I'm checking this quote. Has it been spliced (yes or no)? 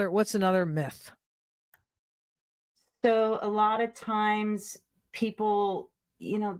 no